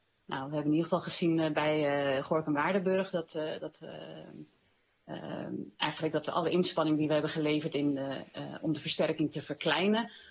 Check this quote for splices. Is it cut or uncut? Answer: uncut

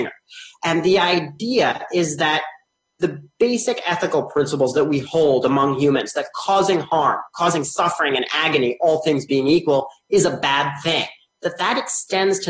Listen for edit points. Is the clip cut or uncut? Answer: uncut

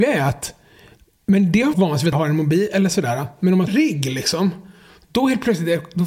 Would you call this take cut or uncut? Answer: cut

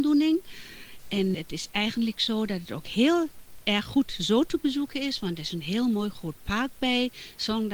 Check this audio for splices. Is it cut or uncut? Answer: cut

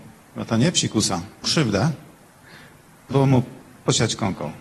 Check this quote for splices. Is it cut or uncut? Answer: cut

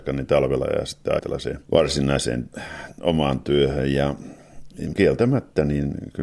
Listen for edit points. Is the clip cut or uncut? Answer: cut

